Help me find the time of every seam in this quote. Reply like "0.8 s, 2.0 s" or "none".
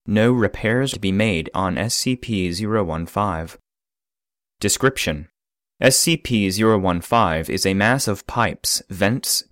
0.9 s, 1.5 s